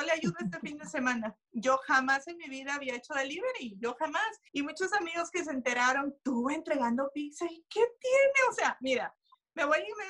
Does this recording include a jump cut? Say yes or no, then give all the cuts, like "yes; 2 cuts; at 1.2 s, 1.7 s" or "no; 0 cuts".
yes; 1 cut; at 4.5 s